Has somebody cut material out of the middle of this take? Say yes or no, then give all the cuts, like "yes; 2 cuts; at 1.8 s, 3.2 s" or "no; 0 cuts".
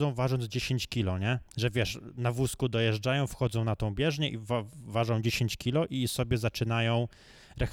yes; 1 cut; at 1.5 s